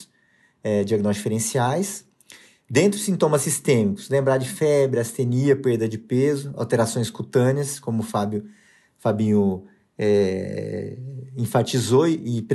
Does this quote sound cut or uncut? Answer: uncut